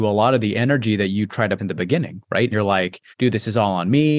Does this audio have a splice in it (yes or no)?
yes